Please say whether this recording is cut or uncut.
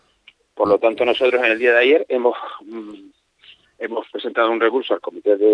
uncut